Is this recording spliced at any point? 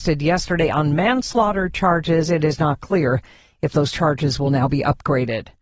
no; 0 cuts

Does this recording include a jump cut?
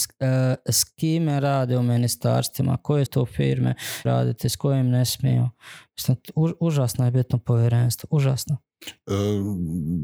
yes; 2 cuts; at 3.1 s, 4.1 s

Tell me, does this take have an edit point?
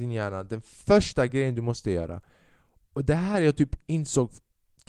no; 0 cuts

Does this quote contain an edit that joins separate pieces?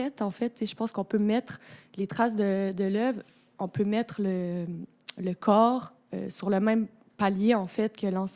no; 0 cuts

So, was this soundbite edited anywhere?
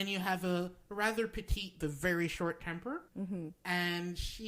yes; 2 cuts; at 1.8 s, 3.1 s

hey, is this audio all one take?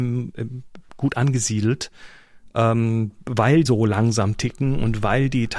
no; 1 cut; at 3.7 s

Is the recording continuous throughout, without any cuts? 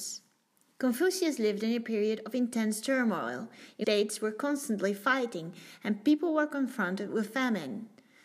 no; 1 cut; at 3.8 s

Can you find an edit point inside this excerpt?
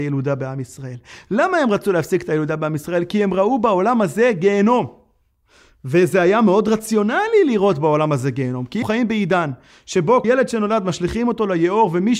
yes; 2 cuts; at 8.8 s, 10.2 s

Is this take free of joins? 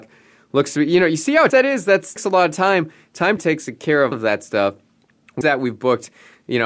no; 5 cuts; at 1.5 s, 2.2 s, 3.4 s, 4.1 s, 5.4 s

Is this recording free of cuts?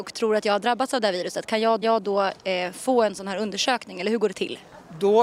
no; 1 cut; at 1.8 s

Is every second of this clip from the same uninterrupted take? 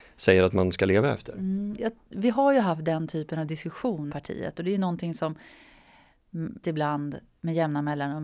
no; 3 cuts; at 1.7 s, 4.1 s, 6.6 s

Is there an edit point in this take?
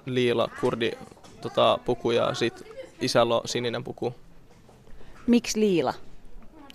no; 0 cuts

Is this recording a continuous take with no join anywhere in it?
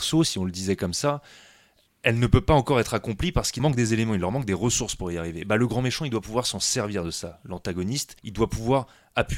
no; 2 cuts; at 3.6 s, 8.2 s

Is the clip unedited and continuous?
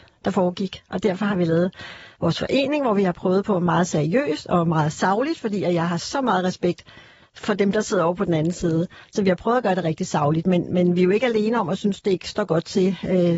yes; 0 cuts

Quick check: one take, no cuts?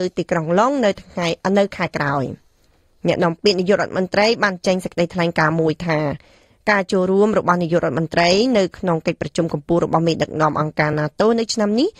yes; 0 cuts

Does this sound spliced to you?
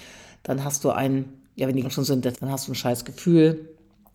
yes; 2 cuts; at 1.8 s, 2.3 s

